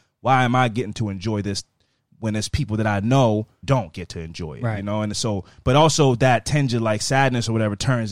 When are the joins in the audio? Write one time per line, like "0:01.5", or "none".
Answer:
0:03.6